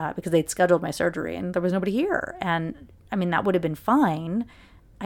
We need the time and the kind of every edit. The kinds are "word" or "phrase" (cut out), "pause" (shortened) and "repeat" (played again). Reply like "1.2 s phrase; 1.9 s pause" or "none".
none